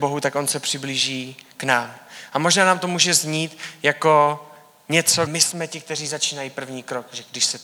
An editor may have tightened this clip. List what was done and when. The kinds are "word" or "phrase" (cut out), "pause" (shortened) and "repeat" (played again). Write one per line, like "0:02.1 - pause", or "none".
0:05.3 - word